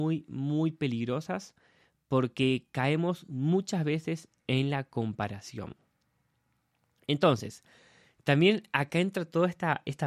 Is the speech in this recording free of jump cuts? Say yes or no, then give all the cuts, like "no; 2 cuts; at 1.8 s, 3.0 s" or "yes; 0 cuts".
yes; 0 cuts